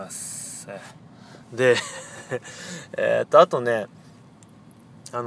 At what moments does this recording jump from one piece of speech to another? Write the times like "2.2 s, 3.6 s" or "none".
1.4 s